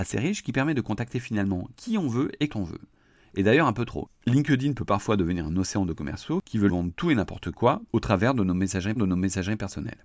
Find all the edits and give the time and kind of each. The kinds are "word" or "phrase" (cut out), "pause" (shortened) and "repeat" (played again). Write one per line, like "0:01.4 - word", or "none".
0:02.5 - word
0:06.7 - word
0:07.9 - pause
0:09.0 - repeat

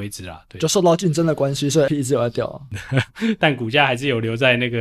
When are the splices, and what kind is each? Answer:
0:01.9 - word

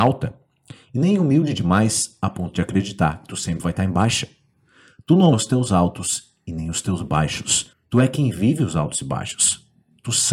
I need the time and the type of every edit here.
0:05.3 - word
0:07.7 - pause

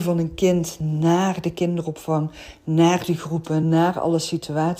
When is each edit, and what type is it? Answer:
none

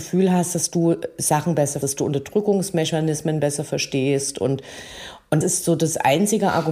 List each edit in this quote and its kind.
0:01.8 - word
0:05.4 - word

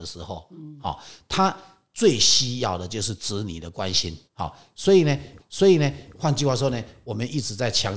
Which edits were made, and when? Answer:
0:04.3 - pause
0:05.4 - repeat

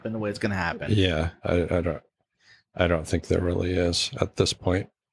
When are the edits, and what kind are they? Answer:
none

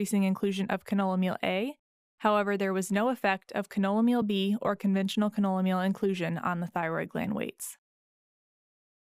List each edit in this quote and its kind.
none

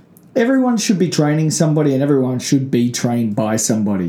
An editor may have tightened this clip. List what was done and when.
none

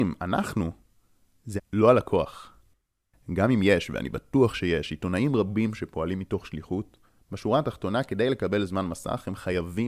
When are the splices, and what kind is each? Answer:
0:01.6 - word

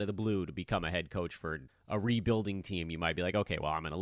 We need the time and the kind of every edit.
0:01.7 - pause

